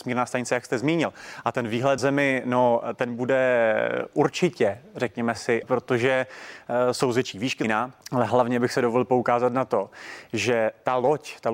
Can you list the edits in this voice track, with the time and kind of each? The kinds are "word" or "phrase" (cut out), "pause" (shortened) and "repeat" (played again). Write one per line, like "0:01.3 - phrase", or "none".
0:02.0 - word
0:05.6 - word
0:07.6 - phrase
0:08.0 - pause